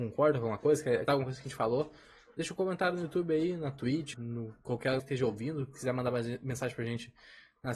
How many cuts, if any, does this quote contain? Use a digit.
3